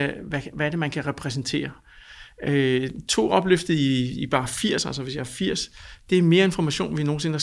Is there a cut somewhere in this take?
no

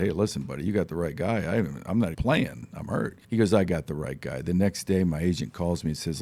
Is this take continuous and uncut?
no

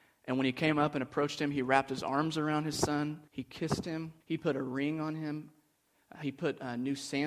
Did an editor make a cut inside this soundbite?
yes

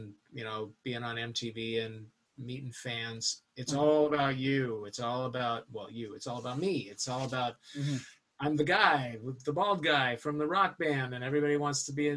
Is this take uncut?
yes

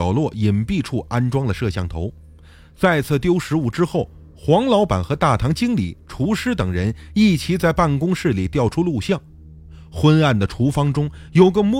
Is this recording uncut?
yes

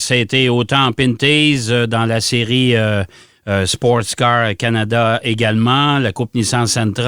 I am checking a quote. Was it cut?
no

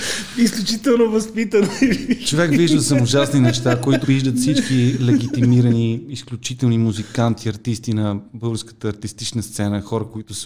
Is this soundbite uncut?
no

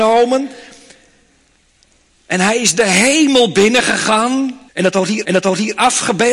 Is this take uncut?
no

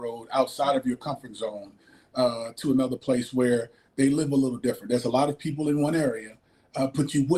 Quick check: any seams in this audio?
no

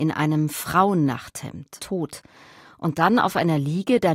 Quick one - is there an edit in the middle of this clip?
yes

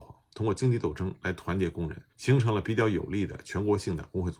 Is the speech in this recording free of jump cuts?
no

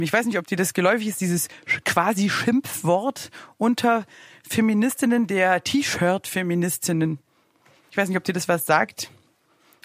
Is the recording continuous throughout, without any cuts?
yes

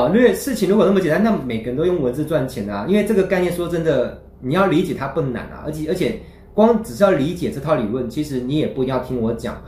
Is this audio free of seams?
yes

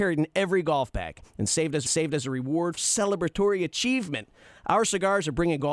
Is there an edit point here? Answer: yes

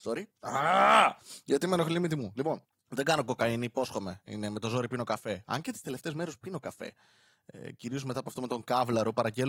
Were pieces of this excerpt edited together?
no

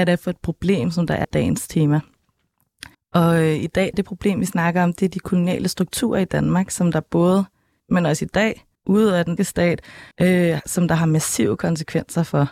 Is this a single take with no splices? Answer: no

